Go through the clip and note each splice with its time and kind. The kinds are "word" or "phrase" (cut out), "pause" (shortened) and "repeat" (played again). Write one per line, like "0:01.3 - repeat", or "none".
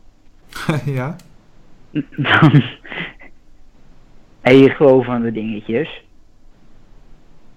0:04.7 - word